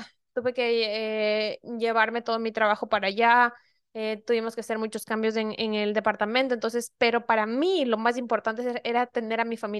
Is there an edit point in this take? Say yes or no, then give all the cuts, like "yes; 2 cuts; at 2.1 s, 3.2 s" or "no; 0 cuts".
no; 0 cuts